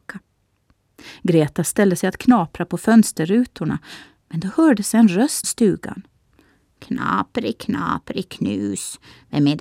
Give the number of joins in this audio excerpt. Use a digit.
1